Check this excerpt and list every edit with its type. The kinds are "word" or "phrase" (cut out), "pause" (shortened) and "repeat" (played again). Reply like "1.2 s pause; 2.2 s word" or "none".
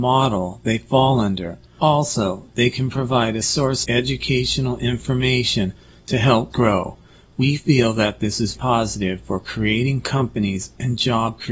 3.4 s word; 3.8 s word; 6.5 s word; 8.5 s word